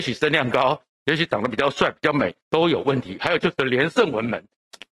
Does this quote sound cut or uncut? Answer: cut